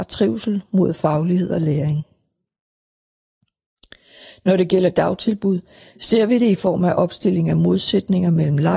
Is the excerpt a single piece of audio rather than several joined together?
yes; 0 cuts

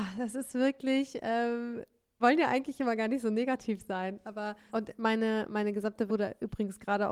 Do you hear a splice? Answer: yes; 3 cuts; at 2.2 s, 4.7 s, 6.1 s

